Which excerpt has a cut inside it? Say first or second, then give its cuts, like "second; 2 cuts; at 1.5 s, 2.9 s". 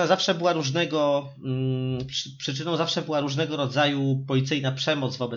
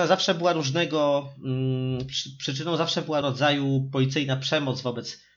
second; 1 cut; at 3.2 s